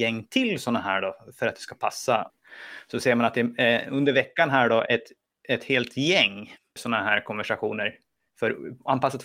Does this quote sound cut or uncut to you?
uncut